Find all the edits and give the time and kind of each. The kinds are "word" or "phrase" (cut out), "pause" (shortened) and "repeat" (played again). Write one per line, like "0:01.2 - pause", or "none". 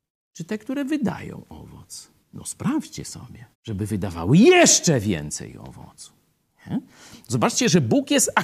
0:02.2 - pause
0:03.5 - pause